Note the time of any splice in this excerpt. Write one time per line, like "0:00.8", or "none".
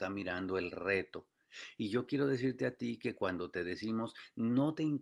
none